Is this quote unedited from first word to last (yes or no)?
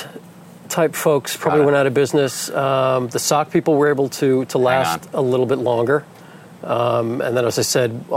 yes